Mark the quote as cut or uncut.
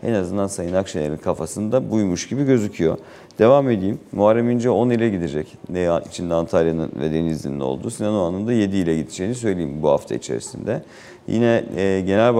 uncut